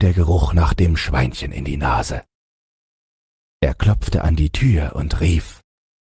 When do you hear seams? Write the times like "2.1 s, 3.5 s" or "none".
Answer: none